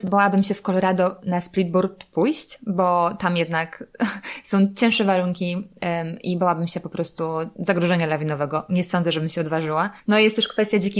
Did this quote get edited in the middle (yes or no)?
yes